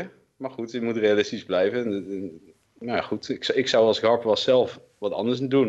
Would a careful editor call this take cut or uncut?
uncut